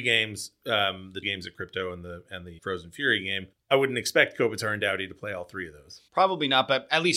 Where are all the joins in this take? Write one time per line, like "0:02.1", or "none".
0:01.2
0:02.6
0:03.5
0:06.1